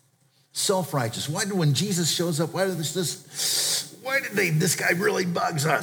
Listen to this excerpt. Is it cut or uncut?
uncut